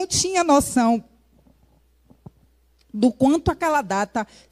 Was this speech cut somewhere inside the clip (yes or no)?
no